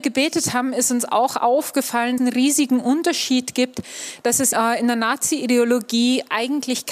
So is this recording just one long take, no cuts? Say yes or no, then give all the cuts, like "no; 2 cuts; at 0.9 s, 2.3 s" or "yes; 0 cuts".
no; 2 cuts; at 2.2 s, 4.5 s